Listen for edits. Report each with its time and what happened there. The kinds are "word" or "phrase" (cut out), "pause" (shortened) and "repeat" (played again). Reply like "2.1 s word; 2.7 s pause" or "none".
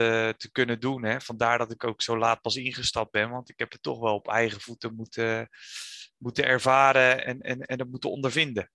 7.2 s word